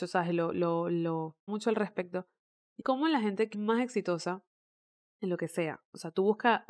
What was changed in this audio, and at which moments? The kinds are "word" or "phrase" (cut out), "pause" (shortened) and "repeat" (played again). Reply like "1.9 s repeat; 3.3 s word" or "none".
1.5 s word; 2.8 s word; 3.5 s word

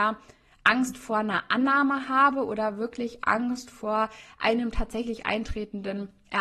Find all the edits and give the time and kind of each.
none

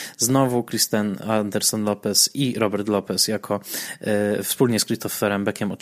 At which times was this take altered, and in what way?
none

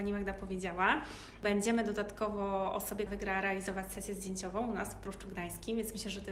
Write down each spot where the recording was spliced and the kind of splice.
3.1 s word

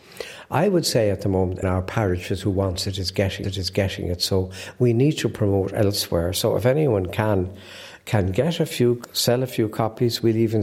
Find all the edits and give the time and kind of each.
1.6 s phrase; 3.4 s repeat

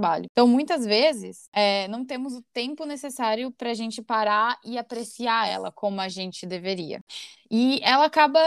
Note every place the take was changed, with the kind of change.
none

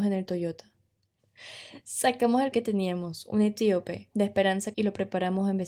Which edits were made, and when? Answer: 2.5 s word; 4.1 s word; 4.7 s word

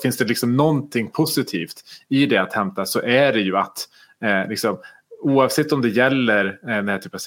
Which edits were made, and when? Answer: none

